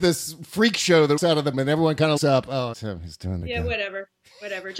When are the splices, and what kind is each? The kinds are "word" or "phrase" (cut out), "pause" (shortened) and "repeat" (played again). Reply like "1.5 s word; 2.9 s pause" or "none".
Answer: 1.2 s word; 1.5 s word; 2.2 s word; 2.7 s word; 3.4 s word